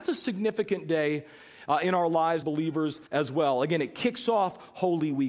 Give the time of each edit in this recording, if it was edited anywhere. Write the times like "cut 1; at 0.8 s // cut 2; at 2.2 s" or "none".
cut 1; at 2.4 s // cut 2; at 3.1 s